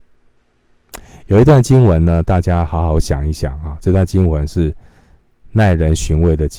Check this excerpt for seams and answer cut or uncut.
uncut